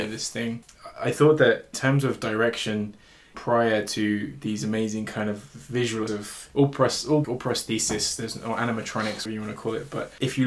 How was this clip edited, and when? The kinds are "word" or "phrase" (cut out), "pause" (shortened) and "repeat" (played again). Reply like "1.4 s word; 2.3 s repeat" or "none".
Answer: 1.7 s word; 3.3 s word; 6.1 s word; 7.2 s word; 9.3 s word